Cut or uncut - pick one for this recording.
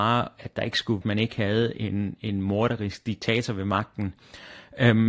cut